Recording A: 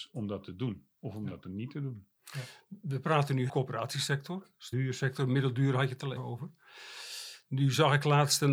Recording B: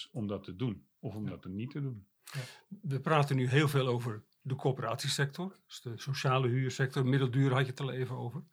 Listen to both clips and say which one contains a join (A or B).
A